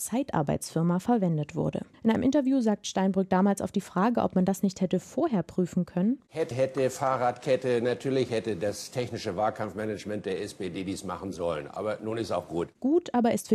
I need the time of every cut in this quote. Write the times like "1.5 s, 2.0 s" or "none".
1.9 s, 6.5 s